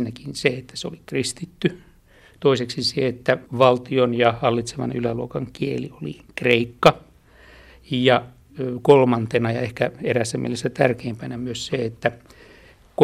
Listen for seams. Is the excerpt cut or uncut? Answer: cut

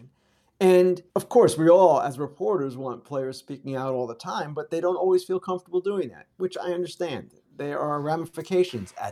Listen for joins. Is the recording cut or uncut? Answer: cut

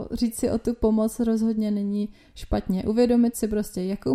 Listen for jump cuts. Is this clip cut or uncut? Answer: uncut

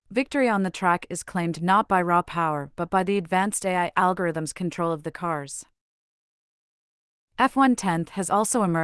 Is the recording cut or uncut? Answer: uncut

